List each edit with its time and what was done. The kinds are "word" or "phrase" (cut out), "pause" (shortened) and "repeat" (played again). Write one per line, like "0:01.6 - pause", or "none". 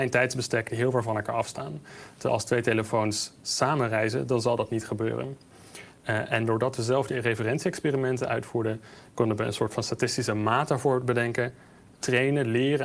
none